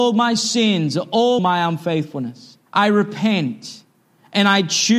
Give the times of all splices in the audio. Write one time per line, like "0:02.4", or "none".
0:01.4
0:02.7